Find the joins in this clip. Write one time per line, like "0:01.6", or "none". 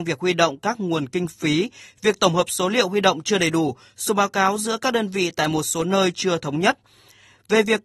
none